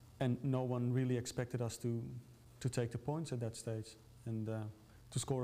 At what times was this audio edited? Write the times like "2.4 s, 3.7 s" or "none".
none

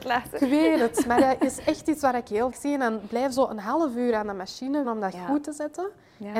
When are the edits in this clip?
2.5 s, 4.8 s

